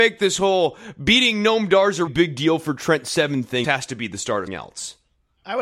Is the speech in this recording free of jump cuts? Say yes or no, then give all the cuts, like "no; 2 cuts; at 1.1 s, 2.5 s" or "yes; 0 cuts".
no; 3 cuts; at 2.1 s, 3.6 s, 4.5 s